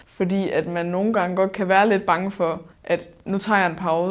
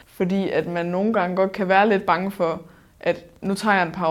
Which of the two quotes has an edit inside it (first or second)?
first